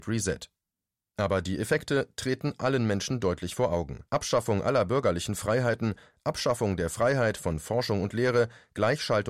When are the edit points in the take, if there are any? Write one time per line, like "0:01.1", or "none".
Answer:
0:04.1